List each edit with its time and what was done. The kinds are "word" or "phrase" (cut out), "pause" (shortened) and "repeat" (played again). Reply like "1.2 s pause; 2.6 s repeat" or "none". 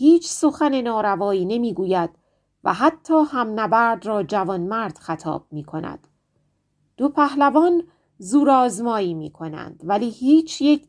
none